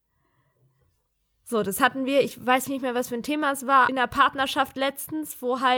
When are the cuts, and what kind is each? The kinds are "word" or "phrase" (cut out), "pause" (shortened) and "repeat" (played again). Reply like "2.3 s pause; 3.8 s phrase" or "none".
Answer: 2.7 s word; 3.9 s phrase